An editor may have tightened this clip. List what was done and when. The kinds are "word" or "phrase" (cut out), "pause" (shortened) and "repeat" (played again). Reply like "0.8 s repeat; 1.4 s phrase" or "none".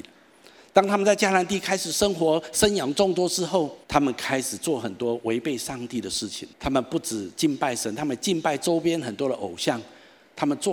3.8 s pause; 6.5 s pause